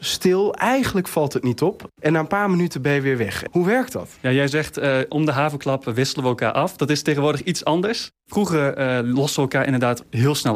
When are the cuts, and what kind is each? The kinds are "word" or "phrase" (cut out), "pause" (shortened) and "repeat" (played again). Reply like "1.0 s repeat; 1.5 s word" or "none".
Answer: 4.2 s pause